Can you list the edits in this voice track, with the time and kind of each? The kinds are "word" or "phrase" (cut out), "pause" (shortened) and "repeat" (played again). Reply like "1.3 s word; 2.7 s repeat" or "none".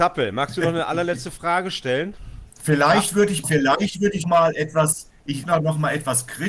3.4 s phrase; 4.2 s word; 5.4 s word